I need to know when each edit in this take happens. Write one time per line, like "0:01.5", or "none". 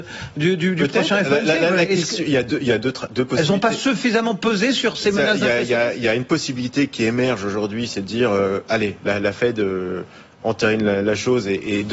none